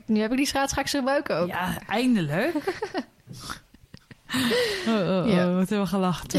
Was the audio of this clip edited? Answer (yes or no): no